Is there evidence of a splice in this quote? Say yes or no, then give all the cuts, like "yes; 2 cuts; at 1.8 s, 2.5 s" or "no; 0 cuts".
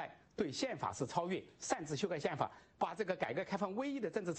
no; 0 cuts